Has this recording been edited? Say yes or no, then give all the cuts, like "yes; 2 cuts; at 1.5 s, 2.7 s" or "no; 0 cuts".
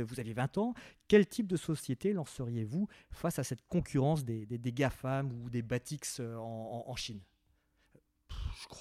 no; 0 cuts